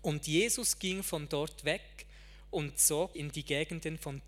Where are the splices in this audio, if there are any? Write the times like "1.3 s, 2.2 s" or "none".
3.1 s